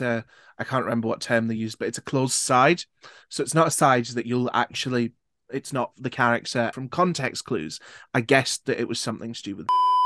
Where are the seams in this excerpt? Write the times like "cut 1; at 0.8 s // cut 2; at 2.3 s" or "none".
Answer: none